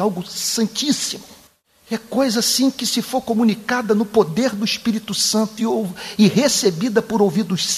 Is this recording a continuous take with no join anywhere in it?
no; 1 cut; at 1.5 s

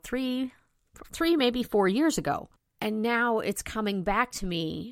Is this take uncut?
yes; 0 cuts

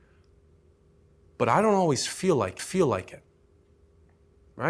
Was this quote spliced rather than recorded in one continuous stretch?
yes; 1 cut; at 2.6 s

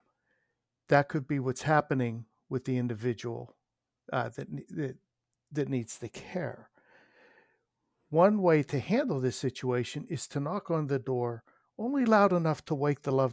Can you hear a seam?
no; 0 cuts

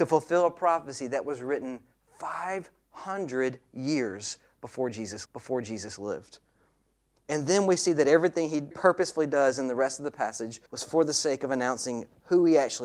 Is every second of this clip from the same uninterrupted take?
no; 3 cuts; at 5.3 s, 8.7 s, 10.7 s

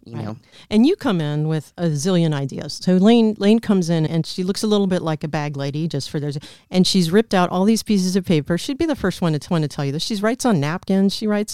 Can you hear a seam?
yes; 2 cuts; at 4.1 s, 9.5 s

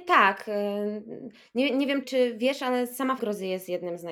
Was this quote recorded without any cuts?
no; 2 cuts; at 2.0 s, 3.2 s

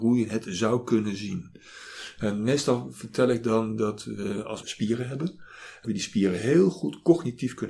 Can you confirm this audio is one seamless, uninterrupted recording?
no; 2 cuts; at 4.6 s, 5.8 s

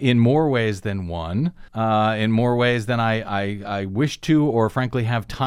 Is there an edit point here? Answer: yes; 1 cut; at 1.7 s

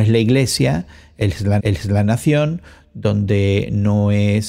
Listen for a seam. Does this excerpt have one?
yes; 1 cut; at 1.6 s

